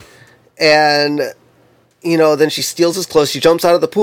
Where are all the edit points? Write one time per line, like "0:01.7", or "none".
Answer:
none